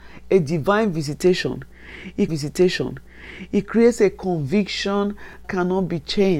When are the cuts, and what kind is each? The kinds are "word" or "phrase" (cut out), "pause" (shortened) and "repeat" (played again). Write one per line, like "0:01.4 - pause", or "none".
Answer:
0:02.3 - repeat
0:05.4 - word